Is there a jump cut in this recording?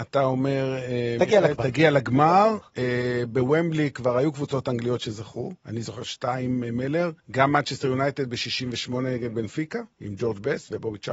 yes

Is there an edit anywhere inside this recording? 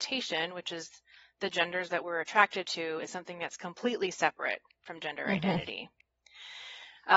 no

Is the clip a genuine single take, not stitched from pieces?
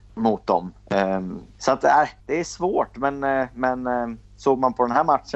no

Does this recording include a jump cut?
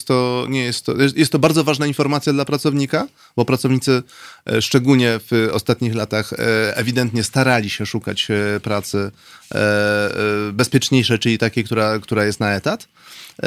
no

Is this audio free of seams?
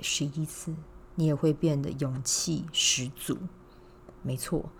yes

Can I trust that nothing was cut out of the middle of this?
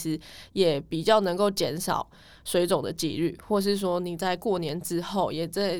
yes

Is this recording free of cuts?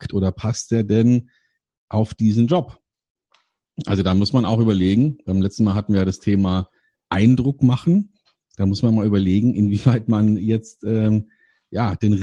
yes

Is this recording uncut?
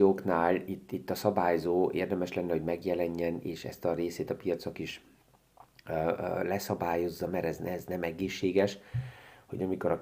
yes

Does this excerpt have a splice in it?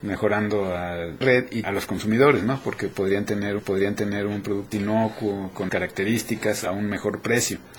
yes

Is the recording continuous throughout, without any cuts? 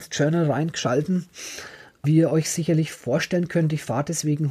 no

